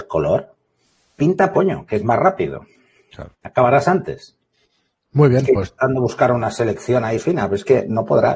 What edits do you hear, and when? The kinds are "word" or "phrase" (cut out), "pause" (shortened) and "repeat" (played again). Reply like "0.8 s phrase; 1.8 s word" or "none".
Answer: 1.5 s word; 3.3 s pause; 7.2 s word